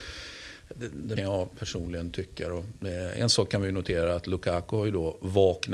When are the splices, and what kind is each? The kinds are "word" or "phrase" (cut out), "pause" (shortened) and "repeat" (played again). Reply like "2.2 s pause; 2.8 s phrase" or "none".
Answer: 1.2 s phrase